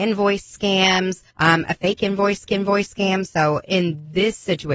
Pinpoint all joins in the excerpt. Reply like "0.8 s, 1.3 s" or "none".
1.3 s, 2.5 s